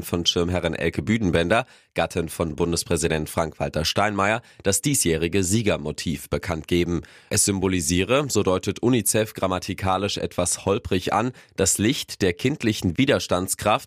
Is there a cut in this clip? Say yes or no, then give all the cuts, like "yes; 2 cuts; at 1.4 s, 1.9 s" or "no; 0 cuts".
no; 0 cuts